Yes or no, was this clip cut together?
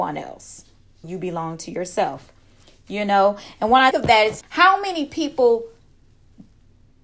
yes